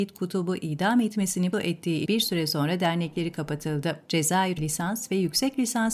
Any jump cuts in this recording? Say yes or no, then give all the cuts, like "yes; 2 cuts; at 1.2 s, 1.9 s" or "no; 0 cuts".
yes; 3 cuts; at 1.5 s, 2.1 s, 4.6 s